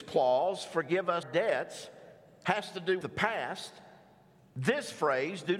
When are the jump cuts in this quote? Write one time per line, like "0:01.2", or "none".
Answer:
0:01.2
0:03.0